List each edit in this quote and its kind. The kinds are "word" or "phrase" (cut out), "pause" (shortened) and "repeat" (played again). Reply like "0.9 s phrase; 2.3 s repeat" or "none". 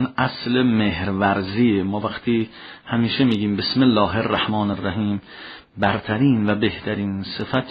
none